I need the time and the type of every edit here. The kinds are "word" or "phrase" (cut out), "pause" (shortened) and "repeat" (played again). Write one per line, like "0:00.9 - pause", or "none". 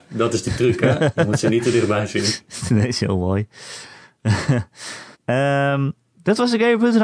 0:05.1 - pause